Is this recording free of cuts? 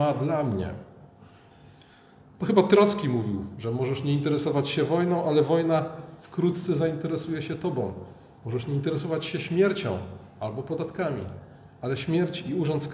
yes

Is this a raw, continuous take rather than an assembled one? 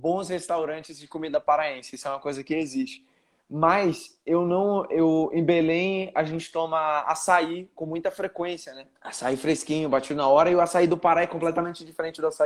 no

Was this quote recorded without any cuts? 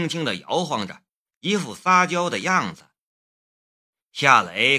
yes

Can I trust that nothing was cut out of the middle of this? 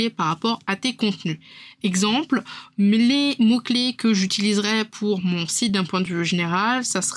yes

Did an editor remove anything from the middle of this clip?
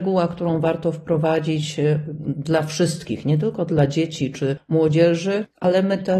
no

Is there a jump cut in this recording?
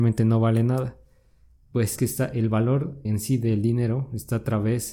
yes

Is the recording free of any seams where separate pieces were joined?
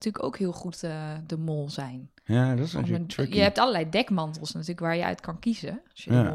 yes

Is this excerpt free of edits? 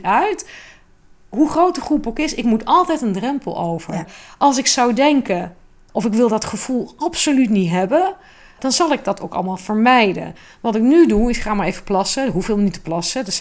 yes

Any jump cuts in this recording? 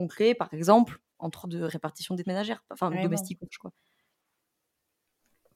yes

